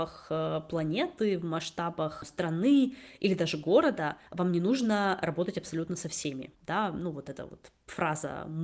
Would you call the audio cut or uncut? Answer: cut